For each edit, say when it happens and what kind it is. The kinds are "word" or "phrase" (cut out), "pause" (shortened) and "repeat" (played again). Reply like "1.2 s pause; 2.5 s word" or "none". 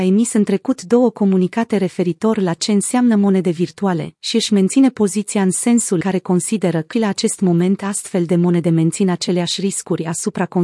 6.0 s word; 6.9 s word